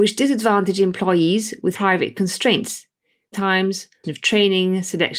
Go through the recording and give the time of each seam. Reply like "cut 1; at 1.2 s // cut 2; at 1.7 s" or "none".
cut 1; at 1.7 s // cut 2; at 3.3 s // cut 3; at 4.0 s